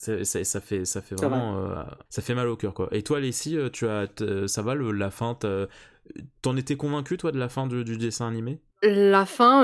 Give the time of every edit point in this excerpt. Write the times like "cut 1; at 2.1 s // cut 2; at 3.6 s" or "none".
cut 1; at 2.1 s // cut 2; at 6.4 s // cut 3; at 8.7 s